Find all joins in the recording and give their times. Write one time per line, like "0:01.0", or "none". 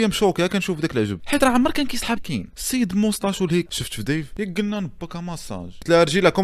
0:02.2
0:03.7